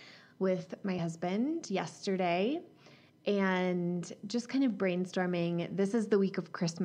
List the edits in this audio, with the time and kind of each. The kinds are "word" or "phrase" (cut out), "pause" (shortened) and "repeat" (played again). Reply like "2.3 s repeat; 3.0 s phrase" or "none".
none